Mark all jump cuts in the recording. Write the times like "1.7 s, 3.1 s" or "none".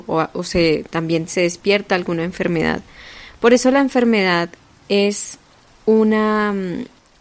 none